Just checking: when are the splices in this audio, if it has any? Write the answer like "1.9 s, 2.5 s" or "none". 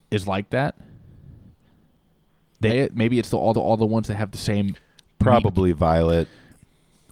2.7 s, 3.5 s, 4.3 s